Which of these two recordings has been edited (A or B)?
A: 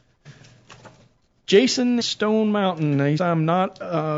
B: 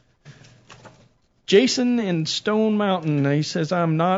A